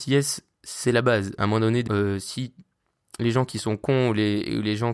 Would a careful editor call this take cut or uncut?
cut